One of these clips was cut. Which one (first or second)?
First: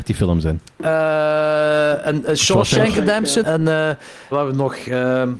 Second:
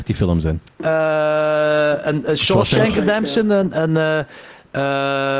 first